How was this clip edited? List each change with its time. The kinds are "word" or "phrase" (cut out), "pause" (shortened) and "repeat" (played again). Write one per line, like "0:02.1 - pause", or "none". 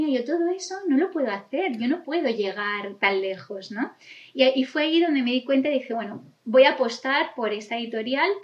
none